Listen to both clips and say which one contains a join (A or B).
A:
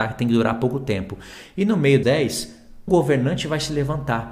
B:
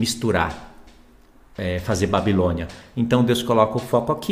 A